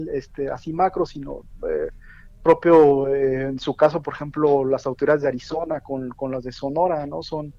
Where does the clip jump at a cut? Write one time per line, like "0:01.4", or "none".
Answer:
none